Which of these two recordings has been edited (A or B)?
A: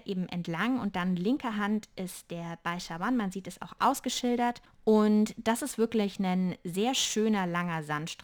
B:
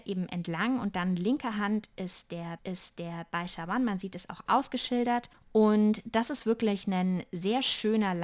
B